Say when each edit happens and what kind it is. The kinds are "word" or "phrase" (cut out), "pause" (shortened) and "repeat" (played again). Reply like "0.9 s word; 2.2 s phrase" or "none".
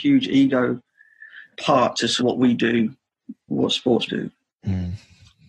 1.5 s word; 2.2 s word; 4.1 s word